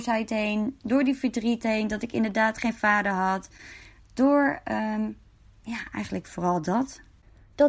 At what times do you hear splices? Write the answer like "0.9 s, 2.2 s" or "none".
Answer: none